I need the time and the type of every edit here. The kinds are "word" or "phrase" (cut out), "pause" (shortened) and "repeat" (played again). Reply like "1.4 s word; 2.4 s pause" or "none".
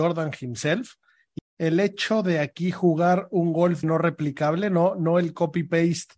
1.4 s word; 3.8 s word